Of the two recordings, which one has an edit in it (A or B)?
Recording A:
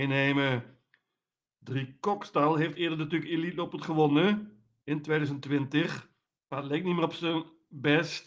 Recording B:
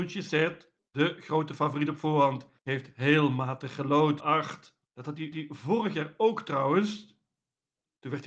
B